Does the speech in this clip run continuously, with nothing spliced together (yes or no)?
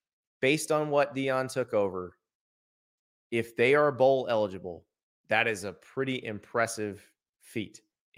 yes